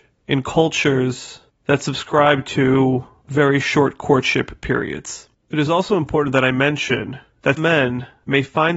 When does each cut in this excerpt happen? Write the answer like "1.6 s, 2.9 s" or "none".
7.6 s